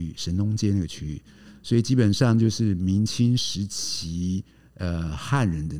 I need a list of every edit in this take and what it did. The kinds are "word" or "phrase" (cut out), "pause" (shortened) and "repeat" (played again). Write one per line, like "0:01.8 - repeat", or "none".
none